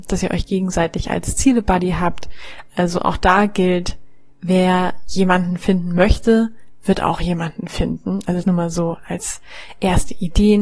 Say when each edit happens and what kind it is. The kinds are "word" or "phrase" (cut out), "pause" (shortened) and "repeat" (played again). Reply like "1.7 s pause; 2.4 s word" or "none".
4.3 s pause; 8.4 s word